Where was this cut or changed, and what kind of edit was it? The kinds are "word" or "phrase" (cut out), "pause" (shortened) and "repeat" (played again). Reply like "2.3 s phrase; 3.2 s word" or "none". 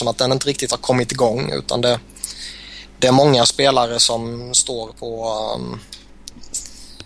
none